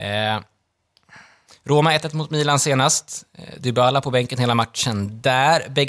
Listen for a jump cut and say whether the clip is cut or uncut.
cut